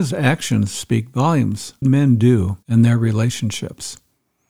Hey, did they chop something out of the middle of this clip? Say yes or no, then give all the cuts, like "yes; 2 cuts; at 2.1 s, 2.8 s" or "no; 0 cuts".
yes; 2 cuts; at 1.8 s, 2.6 s